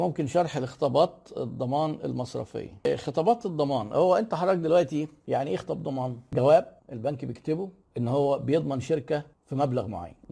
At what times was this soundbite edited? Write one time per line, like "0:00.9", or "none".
0:06.8